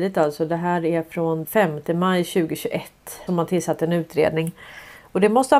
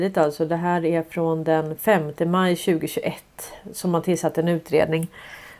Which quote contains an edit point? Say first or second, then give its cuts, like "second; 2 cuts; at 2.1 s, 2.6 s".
first; 2 cuts; at 1.4 s, 3.3 s